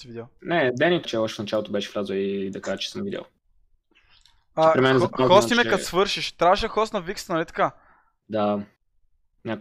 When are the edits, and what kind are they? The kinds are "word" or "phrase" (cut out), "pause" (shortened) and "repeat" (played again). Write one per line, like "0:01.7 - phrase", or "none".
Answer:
0:01.0 - word